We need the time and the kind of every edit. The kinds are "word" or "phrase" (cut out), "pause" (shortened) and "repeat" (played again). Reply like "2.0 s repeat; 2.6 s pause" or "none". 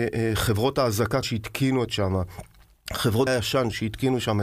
1.2 s word; 1.9 s word; 3.3 s word

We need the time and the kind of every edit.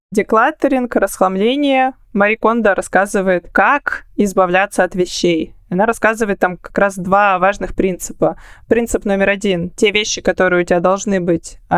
none

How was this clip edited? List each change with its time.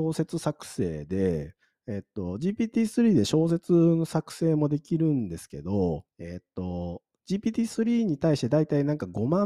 1.6 s pause; 6.1 s pause

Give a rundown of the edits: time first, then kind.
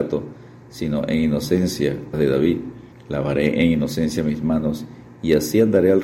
2.1 s phrase; 2.9 s pause

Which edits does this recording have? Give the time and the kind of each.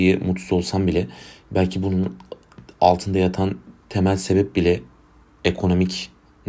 none

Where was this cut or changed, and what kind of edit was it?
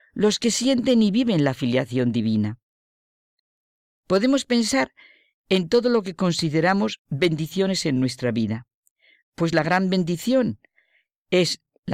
none

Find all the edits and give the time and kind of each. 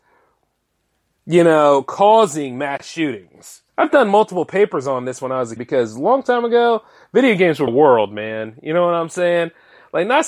3.7 s pause; 5.6 s word; 7.7 s word

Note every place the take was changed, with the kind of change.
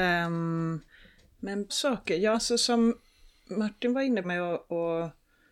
1.7 s word; 2.3 s word; 4.2 s word

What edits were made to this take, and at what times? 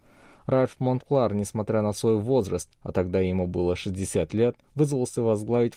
4.6 s pause

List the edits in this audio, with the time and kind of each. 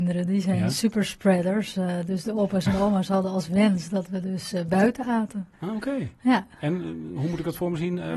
none

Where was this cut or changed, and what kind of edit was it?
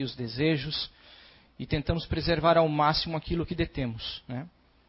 none

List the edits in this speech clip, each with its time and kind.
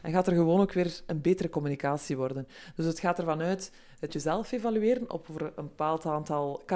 4.1 s phrase

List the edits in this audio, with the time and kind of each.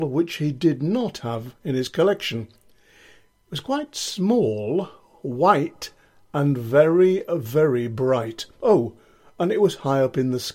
none

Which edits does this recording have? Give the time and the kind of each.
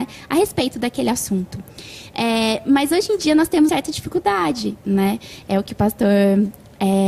3.7 s word

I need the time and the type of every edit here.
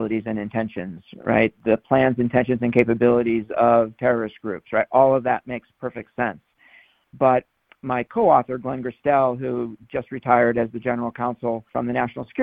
none

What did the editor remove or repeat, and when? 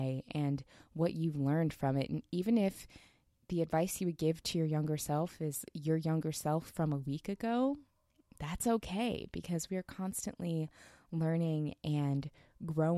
none

